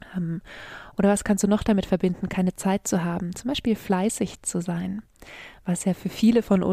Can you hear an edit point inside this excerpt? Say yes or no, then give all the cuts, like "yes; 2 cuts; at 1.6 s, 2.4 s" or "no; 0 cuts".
no; 0 cuts